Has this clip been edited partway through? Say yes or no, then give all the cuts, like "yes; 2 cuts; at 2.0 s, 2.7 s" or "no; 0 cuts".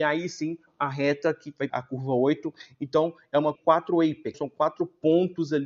yes; 3 cuts; at 1.7 s, 3.5 s, 4.3 s